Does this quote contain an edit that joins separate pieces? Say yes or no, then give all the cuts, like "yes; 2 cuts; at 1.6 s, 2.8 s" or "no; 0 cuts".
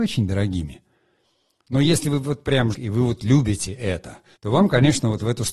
yes; 2 cuts; at 2.7 s, 4.4 s